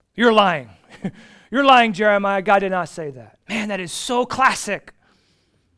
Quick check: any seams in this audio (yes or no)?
yes